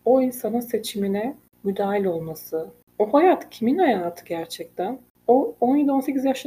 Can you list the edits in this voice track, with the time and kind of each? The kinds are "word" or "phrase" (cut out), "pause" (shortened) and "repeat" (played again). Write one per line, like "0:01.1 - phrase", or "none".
none